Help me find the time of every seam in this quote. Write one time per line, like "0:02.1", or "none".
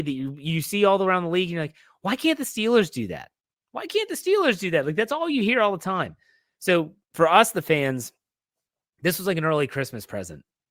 0:07.0